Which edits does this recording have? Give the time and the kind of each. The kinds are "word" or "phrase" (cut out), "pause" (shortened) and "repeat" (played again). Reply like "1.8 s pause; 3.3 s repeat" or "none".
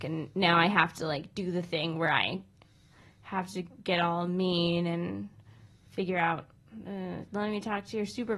none